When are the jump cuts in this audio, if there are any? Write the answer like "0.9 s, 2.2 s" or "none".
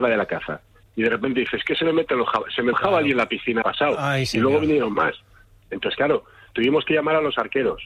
2.7 s, 3.6 s